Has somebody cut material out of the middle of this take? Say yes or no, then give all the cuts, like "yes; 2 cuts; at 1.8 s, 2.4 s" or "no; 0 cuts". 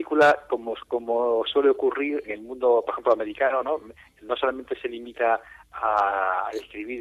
yes; 1 cut; at 2.2 s